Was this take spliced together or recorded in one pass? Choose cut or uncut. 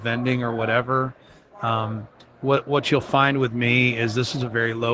uncut